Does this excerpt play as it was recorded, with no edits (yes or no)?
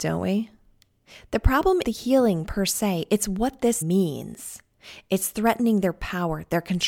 no